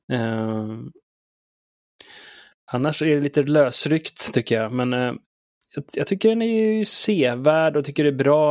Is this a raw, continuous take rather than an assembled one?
yes; 0 cuts

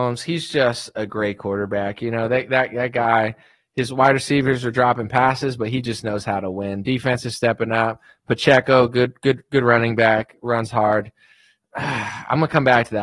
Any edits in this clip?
no; 0 cuts

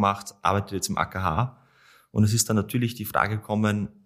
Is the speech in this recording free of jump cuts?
yes; 0 cuts

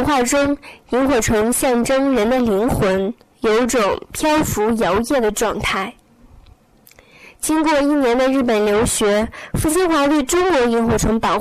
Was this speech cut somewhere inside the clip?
yes; 1 cut; at 3.2 s

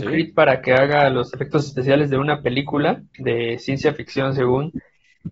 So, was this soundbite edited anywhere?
yes; 1 cut; at 3.1 s

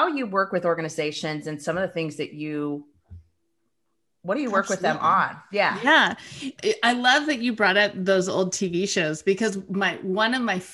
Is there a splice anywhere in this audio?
no; 0 cuts

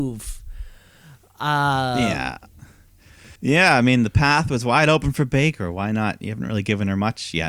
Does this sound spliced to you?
yes; 1 cut; at 3.4 s

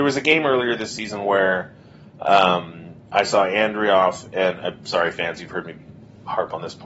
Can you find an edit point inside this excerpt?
no; 0 cuts

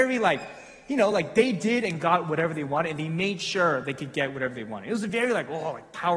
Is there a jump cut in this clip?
no; 0 cuts

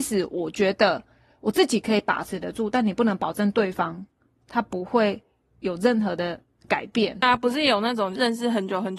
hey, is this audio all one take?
yes; 0 cuts

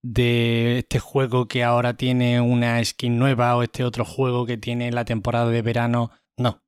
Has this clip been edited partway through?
no; 0 cuts

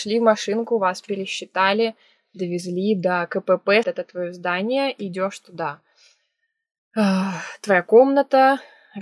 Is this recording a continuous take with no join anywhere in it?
no; 1 cut; at 3.8 s

